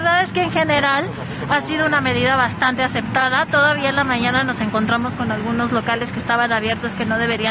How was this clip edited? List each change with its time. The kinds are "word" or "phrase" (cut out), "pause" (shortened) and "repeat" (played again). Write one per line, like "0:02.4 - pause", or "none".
none

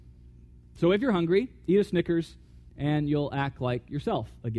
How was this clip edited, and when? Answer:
none

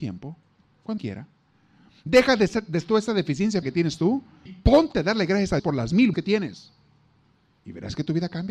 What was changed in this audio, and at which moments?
0:01.0 - word
0:02.9 - word
0:03.6 - word
0:04.5 - word
0:05.6 - word
0:06.1 - word

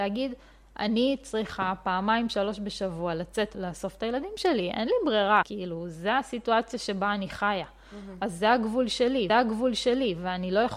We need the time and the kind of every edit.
0:03.5 - word
0:05.4 - word
0:09.3 - repeat

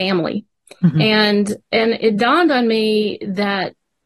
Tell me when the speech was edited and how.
0:01.7 - pause

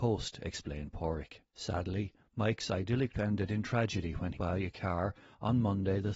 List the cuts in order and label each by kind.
0:01.5 - pause
0:03.1 - word
0:04.3 - phrase

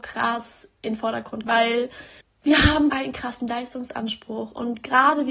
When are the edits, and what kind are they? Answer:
0:01.4 - word
0:02.2 - pause
0:02.9 - word

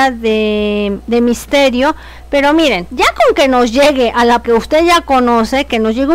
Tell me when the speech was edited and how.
0:04.4 - word

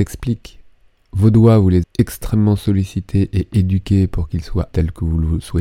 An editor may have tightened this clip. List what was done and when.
0:01.8 - word
0:04.7 - word

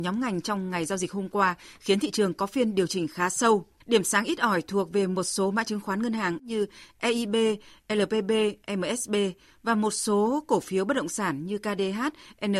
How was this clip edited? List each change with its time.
0:03.8 - pause

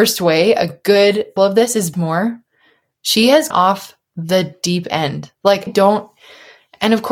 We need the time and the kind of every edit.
0:01.4 - word
0:01.9 - word
0:03.5 - word
0:05.7 - word

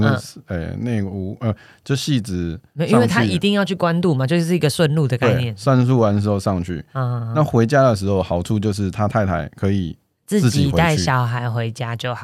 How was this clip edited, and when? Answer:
none

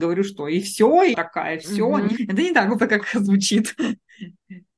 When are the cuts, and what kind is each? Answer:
0:01.1 - word
0:02.2 - word
0:02.8 - word

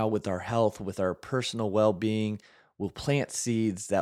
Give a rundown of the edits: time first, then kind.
none

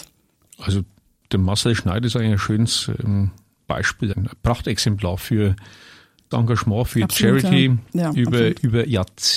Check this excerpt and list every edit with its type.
0:04.1 - word
0:06.3 - word

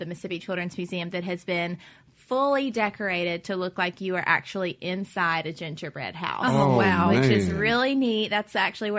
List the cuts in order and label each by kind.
none

